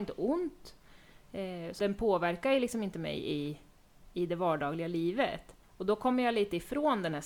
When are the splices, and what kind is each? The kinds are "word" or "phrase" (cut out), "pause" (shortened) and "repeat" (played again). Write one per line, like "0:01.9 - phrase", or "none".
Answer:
0:01.8 - word
0:05.6 - pause